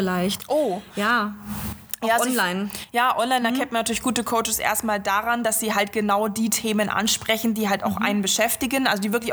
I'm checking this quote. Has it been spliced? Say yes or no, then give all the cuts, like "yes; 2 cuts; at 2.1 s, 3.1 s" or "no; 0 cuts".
no; 0 cuts